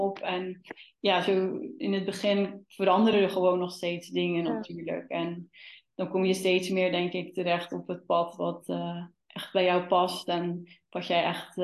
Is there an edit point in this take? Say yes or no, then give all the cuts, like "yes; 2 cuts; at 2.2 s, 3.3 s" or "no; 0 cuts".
no; 0 cuts